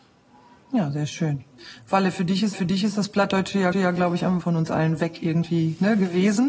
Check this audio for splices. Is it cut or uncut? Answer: cut